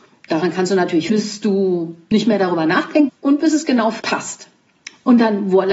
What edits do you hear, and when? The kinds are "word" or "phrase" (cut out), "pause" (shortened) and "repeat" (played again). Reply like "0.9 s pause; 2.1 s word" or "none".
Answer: 1.1 s word; 3.1 s word; 4.0 s word

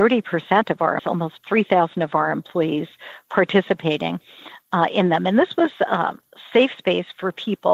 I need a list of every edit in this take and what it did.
1.0 s word

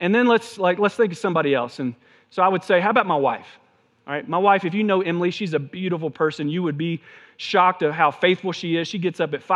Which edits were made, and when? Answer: none

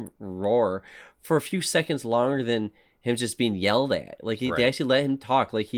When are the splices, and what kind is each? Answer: none

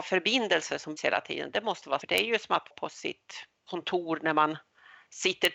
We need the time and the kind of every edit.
1.0 s word; 2.0 s word; 2.7 s word

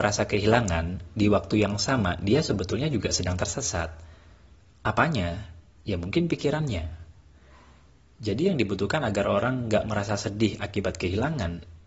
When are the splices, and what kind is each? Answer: none

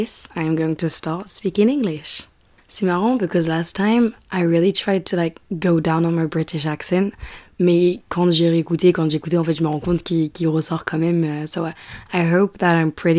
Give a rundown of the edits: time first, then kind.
none

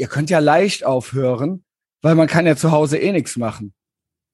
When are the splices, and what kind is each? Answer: none

